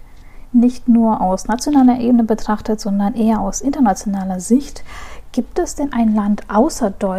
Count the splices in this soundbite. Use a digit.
0